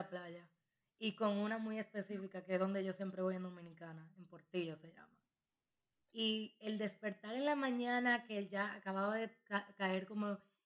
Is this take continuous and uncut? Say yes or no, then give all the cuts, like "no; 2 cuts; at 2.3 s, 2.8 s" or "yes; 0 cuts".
yes; 0 cuts